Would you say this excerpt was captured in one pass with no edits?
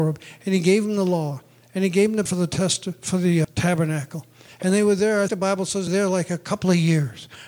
no; 4 cuts; at 2.3 s, 3.4 s, 5.3 s, 5.9 s

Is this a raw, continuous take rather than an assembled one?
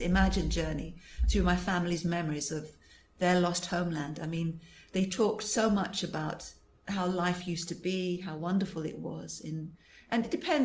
yes; 0 cuts

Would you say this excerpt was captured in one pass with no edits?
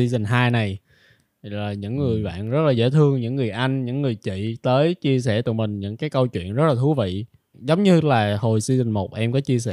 no; 1 cut; at 7.5 s

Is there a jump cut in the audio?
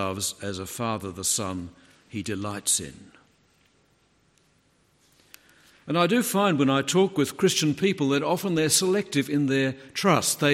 no; 0 cuts

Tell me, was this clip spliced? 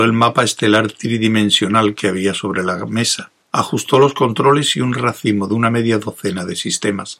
yes; 1 cut; at 3.4 s

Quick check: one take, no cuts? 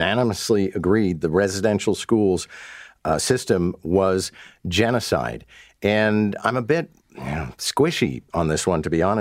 yes; 0 cuts

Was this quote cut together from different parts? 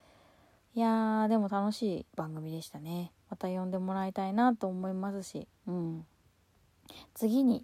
yes; 3 cuts; at 2.1 s, 3.2 s, 5.6 s

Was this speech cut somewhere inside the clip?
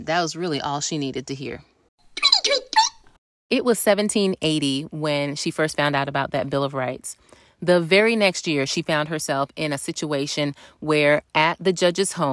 no; 0 cuts

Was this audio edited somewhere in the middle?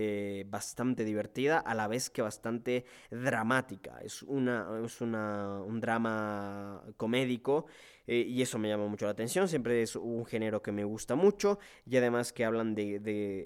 no; 0 cuts

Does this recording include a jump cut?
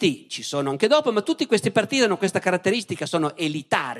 no; 0 cuts

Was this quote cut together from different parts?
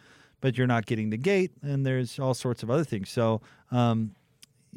yes; 1 cut; at 3.5 s

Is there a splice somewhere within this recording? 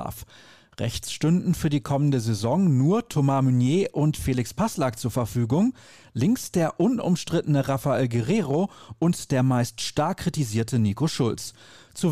no; 0 cuts

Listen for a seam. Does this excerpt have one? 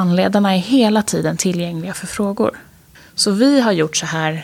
yes; 1 cut; at 2.9 s

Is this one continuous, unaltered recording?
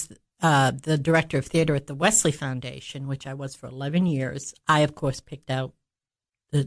yes; 0 cuts

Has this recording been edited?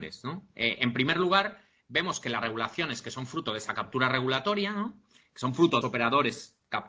yes; 1 cut; at 5.8 s

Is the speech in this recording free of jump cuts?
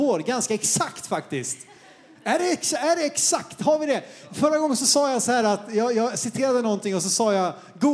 yes; 0 cuts

